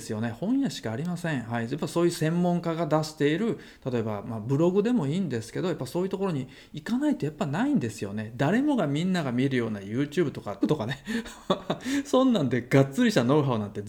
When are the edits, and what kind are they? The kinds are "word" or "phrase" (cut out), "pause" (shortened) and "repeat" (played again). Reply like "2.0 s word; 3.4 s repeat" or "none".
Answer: 10.6 s word